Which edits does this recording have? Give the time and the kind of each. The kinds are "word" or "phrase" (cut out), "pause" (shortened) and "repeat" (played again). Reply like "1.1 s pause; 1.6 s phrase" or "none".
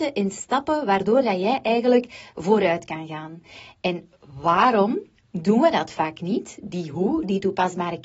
none